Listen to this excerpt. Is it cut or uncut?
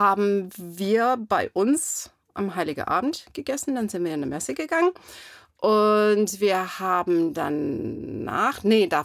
uncut